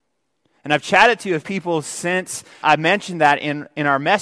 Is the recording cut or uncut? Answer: cut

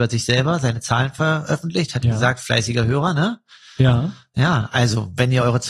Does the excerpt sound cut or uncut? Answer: uncut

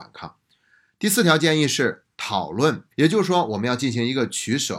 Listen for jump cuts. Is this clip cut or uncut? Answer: cut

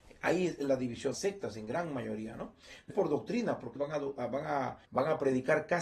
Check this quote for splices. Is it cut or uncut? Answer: cut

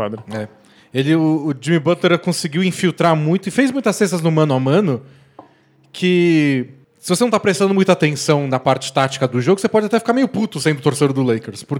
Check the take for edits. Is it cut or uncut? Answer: uncut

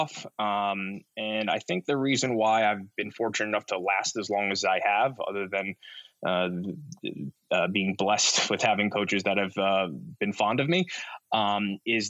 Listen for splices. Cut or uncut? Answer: cut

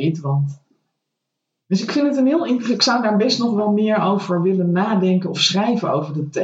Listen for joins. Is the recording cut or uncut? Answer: uncut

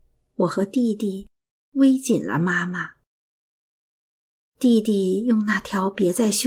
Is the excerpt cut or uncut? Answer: uncut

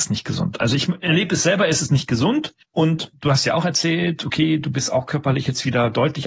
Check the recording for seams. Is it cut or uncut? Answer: uncut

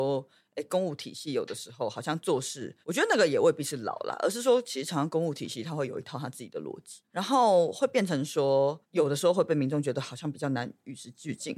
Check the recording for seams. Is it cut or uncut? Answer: cut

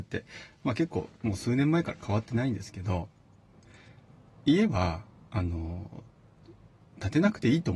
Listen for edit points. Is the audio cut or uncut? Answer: uncut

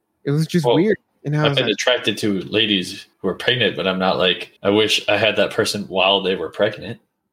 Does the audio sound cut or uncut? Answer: cut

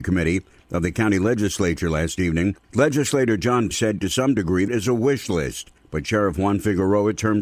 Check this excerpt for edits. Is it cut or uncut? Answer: cut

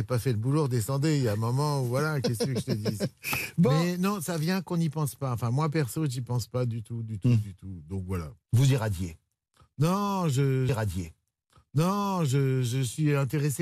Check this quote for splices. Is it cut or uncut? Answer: cut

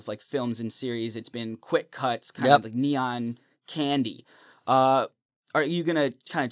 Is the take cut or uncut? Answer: uncut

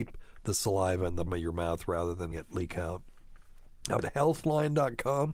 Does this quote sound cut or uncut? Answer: cut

